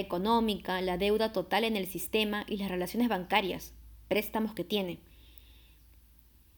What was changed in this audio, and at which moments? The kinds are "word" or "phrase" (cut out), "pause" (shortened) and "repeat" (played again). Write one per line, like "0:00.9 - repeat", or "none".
none